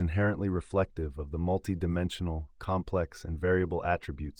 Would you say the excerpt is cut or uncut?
uncut